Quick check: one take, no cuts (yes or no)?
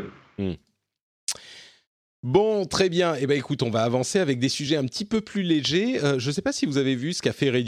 yes